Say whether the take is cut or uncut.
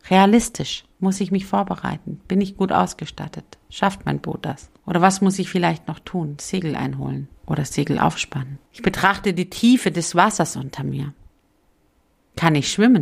cut